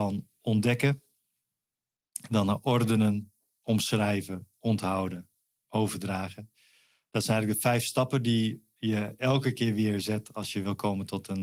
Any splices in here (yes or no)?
no